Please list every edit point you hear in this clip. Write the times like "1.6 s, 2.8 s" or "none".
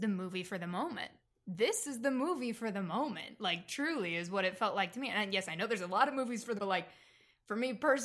6.6 s